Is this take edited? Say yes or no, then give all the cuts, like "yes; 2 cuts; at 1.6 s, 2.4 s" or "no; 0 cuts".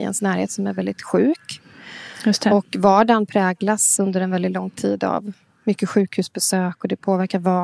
no; 0 cuts